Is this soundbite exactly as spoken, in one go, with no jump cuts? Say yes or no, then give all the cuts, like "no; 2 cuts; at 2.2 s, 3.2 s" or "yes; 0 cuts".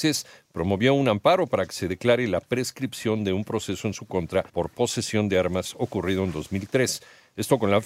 no; 1 cut; at 4.5 s